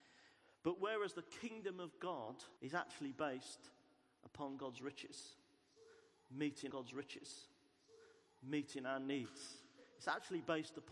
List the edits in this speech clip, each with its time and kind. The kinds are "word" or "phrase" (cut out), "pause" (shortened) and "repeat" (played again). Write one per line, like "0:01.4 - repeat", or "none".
0:02.6 - pause
0:06.7 - repeat